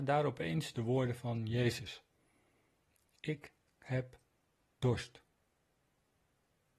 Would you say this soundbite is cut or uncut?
uncut